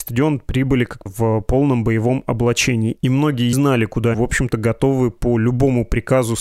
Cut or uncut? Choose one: cut